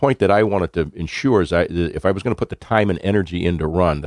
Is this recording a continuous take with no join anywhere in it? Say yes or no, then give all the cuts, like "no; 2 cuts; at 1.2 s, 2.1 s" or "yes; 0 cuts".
yes; 0 cuts